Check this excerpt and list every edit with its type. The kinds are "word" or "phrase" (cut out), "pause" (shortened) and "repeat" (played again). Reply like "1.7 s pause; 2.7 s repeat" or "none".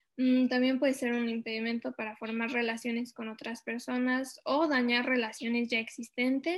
none